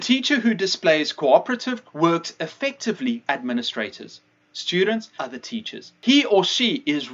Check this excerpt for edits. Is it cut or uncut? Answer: cut